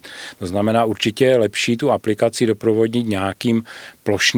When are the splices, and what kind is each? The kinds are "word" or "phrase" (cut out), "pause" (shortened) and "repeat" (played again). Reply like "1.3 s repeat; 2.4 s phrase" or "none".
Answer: none